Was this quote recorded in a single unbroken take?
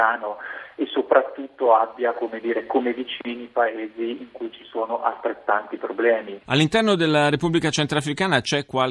yes; 0 cuts

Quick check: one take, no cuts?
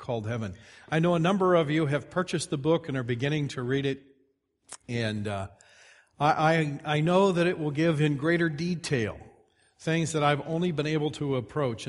yes; 0 cuts

